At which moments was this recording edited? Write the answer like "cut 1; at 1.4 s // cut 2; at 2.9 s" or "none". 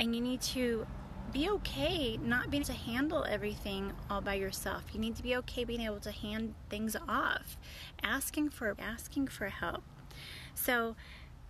cut 1; at 2.6 s // cut 2; at 8.8 s

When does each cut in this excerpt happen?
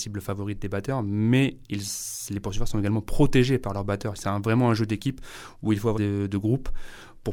cut 1; at 5.9 s

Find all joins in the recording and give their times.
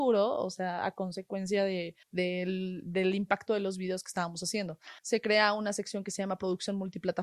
cut 1; at 2.0 s // cut 2; at 5.0 s

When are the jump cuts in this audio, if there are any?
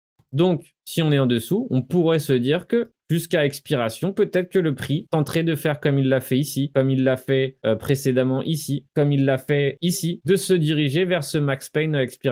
none

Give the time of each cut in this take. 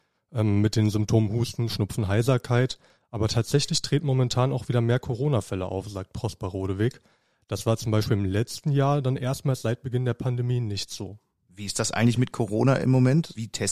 none

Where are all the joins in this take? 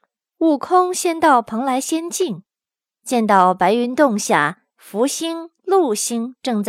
none

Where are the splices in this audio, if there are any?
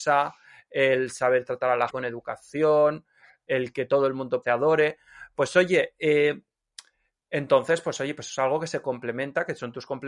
cut 1; at 1.9 s // cut 2; at 4.4 s

